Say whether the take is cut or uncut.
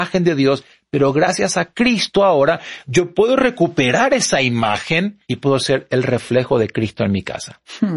cut